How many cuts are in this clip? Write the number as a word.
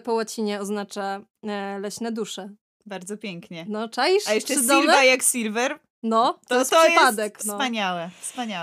one